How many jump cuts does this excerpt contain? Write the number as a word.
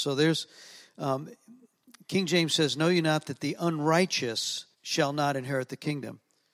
one